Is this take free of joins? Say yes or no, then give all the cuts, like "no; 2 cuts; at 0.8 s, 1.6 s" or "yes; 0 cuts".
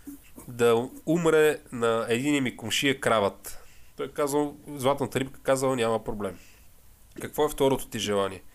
yes; 0 cuts